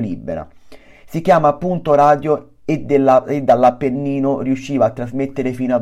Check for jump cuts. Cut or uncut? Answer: uncut